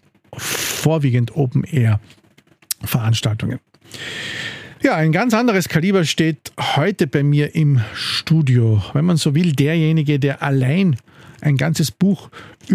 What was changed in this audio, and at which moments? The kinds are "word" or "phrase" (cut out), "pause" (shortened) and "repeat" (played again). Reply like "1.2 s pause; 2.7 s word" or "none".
none